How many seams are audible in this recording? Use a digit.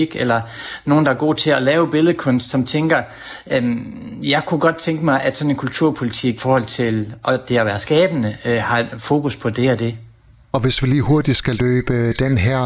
1